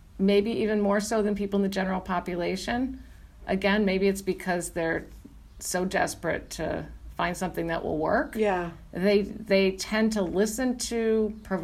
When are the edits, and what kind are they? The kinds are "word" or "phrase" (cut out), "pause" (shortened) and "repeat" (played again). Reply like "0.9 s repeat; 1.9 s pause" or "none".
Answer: none